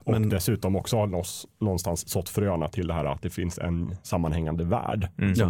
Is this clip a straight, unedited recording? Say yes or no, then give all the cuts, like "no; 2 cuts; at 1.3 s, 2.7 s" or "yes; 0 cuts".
yes; 0 cuts